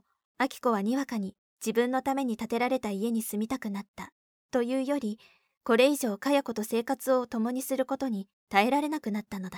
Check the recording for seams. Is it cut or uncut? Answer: uncut